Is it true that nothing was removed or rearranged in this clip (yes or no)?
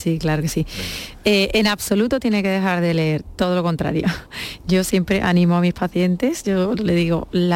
yes